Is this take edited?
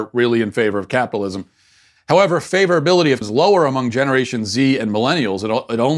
yes; 1 cut; at 3.2 s

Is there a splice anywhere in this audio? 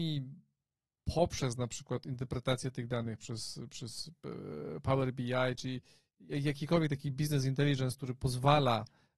no; 0 cuts

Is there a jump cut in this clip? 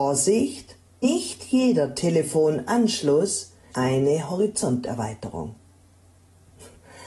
yes; 2 cuts; at 1.0 s, 3.7 s

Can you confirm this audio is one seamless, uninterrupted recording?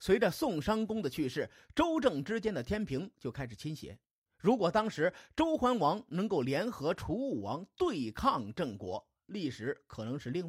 no; 1 cut; at 4.3 s

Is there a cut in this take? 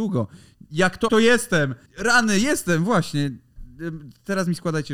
yes; 2 cuts; at 1.1 s, 1.9 s

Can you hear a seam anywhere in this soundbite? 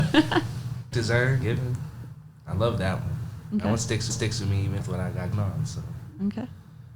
yes; 5 cuts; at 0.9 s, 1.4 s, 4.1 s, 4.8 s, 5.3 s

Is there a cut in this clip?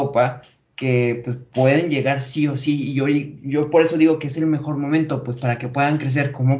no; 0 cuts

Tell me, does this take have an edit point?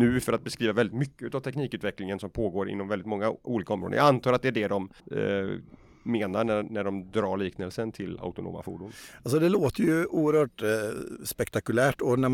yes; 1 cut; at 5.0 s

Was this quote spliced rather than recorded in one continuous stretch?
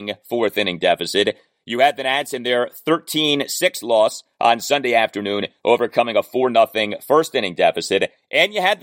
no; 0 cuts

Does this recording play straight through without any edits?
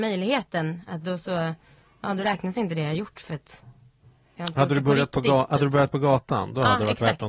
yes; 0 cuts

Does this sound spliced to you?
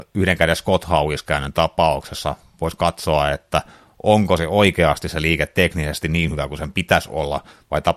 no; 0 cuts

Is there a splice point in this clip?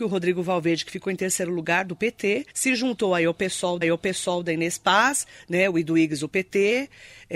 yes; 2 cuts; at 2.5 s, 3.8 s

